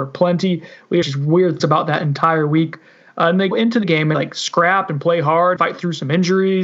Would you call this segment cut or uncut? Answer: cut